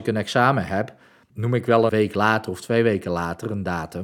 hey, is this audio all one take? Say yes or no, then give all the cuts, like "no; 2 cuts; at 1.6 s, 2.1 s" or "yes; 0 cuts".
no; 2 cuts; at 1.3 s, 1.9 s